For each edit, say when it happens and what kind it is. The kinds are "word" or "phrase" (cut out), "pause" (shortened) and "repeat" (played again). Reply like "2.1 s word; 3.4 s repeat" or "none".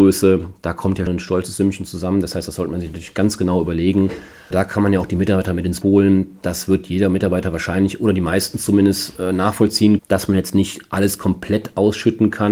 1.1 s word; 4.5 s word; 5.8 s word; 10.0 s word